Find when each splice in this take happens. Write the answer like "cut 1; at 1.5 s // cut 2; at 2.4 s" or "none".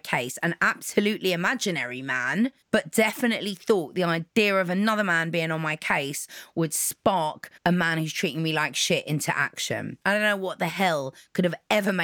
cut 1; at 2.6 s // cut 2; at 7.6 s // cut 3; at 10.0 s